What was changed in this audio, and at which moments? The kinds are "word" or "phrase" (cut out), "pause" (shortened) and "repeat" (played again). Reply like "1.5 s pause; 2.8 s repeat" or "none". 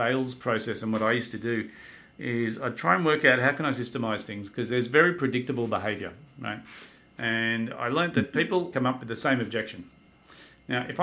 8.7 s word